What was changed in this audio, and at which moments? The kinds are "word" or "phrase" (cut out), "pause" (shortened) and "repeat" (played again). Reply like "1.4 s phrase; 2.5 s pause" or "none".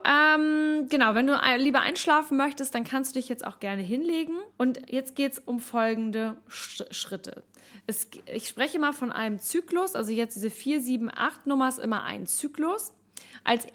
4.5 s pause